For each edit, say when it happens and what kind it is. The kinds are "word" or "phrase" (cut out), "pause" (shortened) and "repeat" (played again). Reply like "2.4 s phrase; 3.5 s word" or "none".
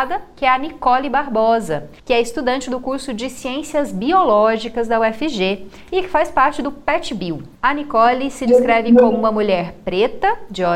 2.0 s pause; 7.5 s pause